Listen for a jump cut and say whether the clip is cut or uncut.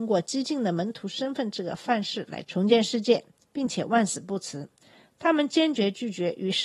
uncut